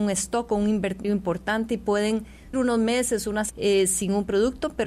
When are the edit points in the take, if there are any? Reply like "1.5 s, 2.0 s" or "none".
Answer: 1.0 s, 2.5 s, 3.5 s